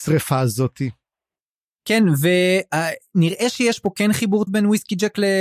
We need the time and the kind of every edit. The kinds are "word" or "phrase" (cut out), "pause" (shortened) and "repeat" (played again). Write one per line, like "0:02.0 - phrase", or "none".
0:04.5 - word